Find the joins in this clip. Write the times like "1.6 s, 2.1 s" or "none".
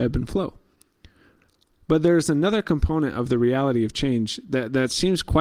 none